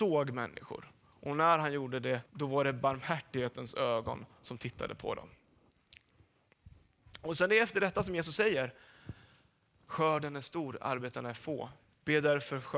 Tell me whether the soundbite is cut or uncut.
cut